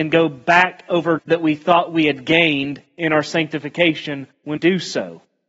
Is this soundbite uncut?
no; 2 cuts; at 1.2 s, 4.6 s

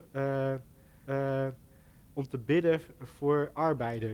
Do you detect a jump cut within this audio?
yes; 1 cut; at 1.0 s

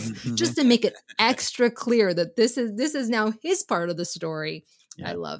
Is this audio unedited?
yes; 0 cuts

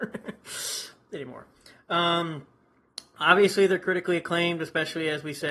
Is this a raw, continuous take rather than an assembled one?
yes; 0 cuts

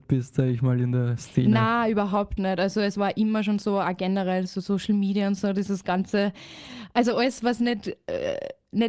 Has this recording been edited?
no; 0 cuts

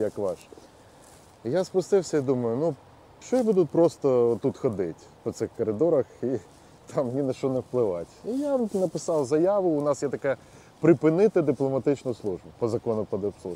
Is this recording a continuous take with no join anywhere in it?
yes; 0 cuts

